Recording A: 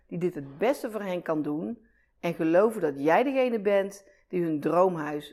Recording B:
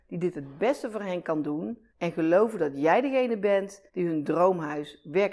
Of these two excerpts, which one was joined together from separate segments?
B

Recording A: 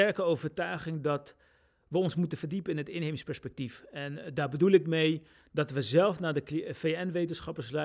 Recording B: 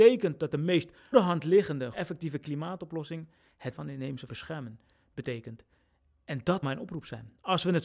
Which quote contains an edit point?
B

